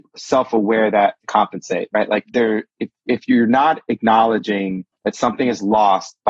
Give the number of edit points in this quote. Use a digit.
4